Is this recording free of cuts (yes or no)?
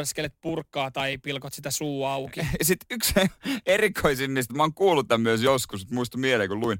no